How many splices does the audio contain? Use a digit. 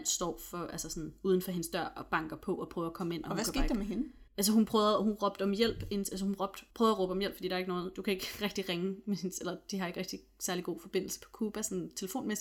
2